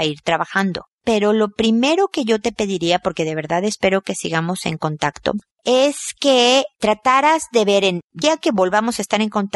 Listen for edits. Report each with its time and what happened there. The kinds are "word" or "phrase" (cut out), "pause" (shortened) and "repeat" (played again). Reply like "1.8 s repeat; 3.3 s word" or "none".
8.2 s word